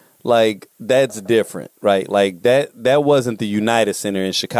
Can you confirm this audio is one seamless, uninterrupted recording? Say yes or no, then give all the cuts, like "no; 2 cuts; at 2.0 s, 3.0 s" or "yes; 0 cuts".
yes; 0 cuts